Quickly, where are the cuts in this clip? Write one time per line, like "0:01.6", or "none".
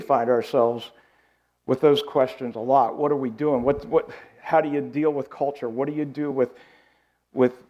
none